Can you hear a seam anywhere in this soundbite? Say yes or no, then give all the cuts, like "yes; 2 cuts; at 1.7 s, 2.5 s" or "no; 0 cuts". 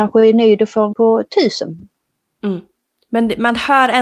yes; 1 cut; at 0.9 s